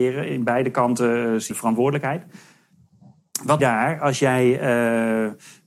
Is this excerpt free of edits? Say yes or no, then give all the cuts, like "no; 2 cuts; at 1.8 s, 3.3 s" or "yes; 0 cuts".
no; 2 cuts; at 1.5 s, 3.6 s